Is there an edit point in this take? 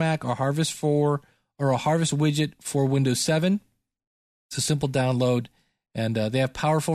no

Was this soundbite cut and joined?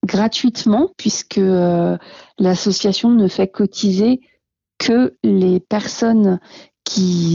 no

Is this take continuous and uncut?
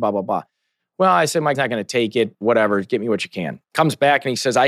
no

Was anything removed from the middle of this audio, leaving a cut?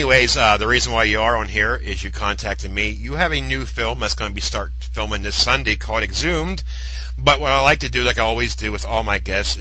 no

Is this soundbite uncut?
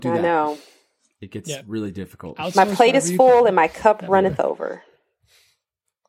yes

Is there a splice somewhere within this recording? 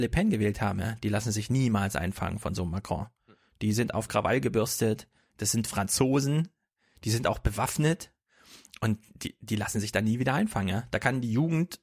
no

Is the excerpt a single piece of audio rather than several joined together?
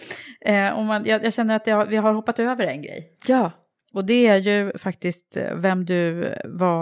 yes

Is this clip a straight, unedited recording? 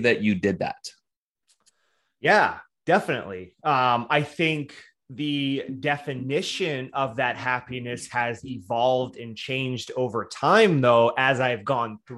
yes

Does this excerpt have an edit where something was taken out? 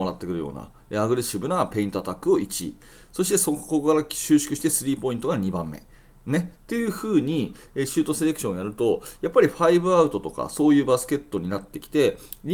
no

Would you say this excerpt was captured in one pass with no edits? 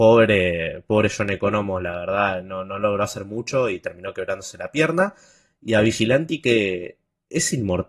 yes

